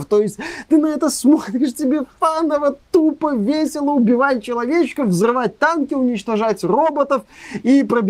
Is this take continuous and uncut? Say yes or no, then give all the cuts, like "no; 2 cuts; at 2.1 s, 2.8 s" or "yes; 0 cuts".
yes; 0 cuts